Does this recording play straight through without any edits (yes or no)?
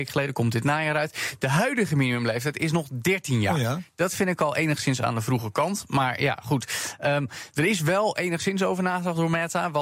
yes